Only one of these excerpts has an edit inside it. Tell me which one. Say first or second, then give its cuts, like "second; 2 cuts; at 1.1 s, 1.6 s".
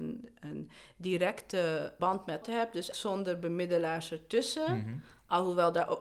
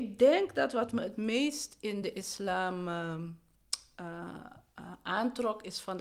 first; 3 cuts; at 2.0 s, 2.4 s, 2.9 s